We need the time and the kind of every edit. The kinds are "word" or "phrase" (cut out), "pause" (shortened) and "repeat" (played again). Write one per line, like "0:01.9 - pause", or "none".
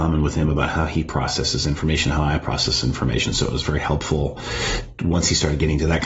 none